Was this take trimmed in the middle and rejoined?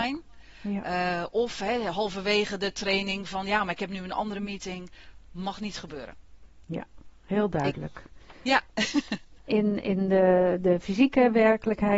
yes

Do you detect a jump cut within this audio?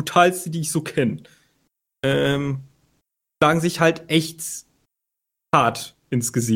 no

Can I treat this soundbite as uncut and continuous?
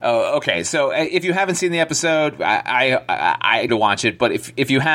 no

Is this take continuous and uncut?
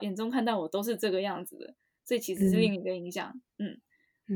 yes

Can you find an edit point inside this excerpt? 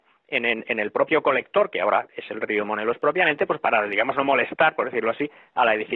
no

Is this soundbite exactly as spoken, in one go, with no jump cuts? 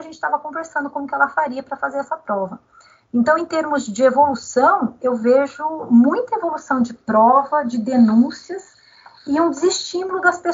yes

